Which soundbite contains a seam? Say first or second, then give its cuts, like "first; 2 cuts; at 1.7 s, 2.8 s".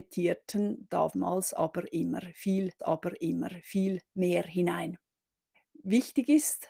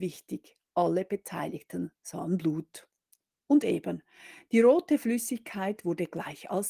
first; 2 cuts; at 2.8 s, 5.5 s